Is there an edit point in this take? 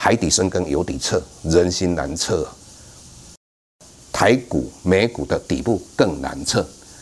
no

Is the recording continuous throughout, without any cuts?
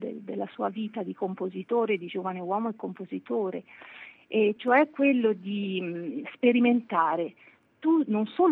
yes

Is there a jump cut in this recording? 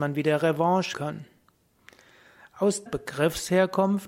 yes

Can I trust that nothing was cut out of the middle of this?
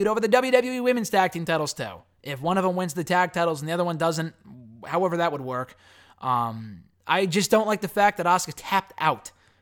yes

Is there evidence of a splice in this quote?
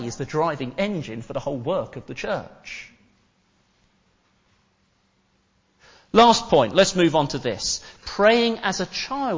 no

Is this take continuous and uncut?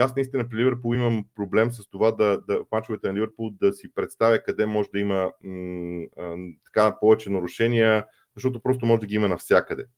yes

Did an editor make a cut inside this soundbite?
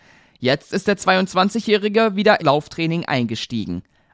yes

